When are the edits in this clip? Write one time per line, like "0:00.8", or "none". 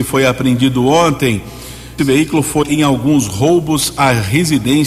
0:02.0
0:02.6

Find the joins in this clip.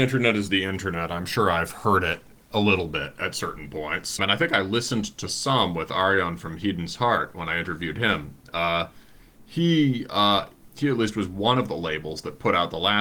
0:04.2

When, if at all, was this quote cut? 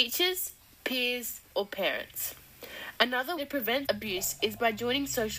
0:01.5
0:03.4
0:03.9

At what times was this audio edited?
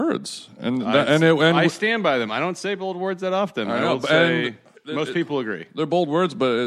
0:04.7

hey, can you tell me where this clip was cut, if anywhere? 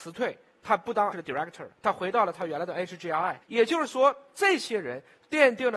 0:01.1
0:01.8
0:03.4

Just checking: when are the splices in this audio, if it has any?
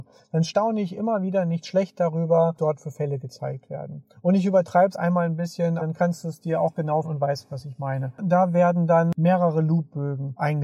0:02.6
0:04.9
0:05.8
0:07.0

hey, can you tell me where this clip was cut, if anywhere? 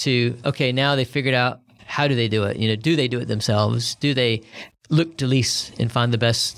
none

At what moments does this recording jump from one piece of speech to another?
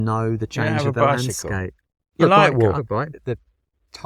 0:02.2
0:02.8

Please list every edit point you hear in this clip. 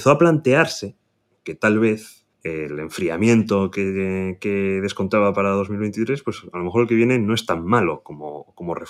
0:02.3

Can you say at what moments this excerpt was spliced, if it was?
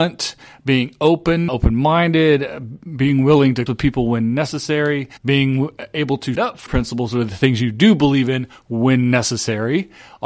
0:01.5
0:03.7
0:05.2
0:06.4
0:06.7

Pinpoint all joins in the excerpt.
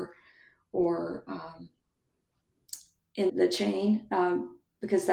0:03.3

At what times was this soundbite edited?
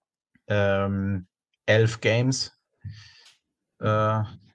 none

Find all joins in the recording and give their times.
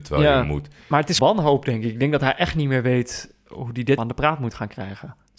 0:01.2
0:04.0

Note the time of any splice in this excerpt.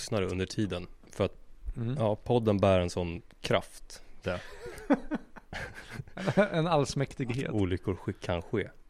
0:04.2

